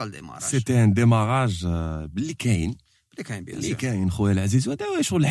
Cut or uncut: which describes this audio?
uncut